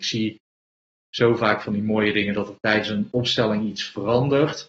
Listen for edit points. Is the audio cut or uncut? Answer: uncut